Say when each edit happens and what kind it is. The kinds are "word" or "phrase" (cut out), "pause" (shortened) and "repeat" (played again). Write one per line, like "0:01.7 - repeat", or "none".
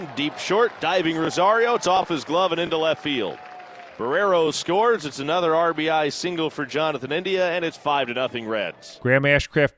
none